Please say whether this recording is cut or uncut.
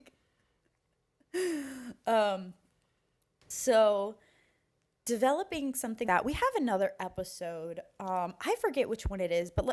cut